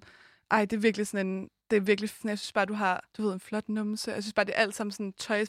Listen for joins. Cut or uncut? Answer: cut